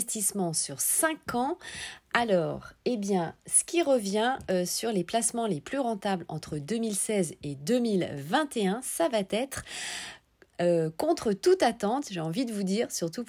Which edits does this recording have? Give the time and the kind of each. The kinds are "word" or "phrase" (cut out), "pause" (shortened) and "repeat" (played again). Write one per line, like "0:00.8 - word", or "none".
none